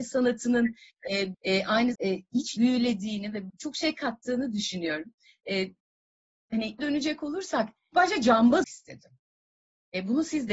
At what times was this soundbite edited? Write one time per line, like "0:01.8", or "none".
0:01.3
0:01.9
0:02.6
0:03.5
0:06.8
0:07.9
0:08.6